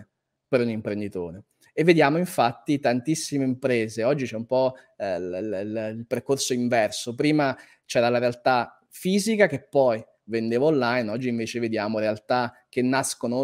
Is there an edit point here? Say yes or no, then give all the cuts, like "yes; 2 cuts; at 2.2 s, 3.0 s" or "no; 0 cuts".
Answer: no; 0 cuts